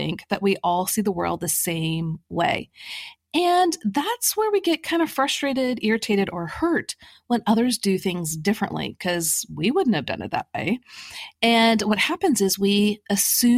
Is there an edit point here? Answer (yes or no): no